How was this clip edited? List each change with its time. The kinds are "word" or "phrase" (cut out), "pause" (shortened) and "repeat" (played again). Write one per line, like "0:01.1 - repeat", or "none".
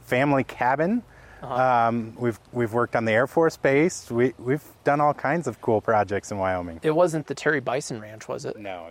0:02.5 - pause